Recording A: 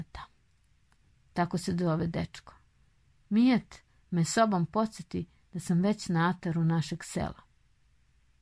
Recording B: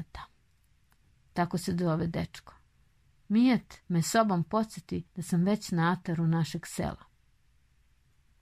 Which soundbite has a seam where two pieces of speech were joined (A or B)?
B